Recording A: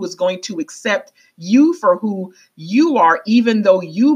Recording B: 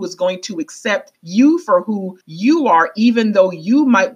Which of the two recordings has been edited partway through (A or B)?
B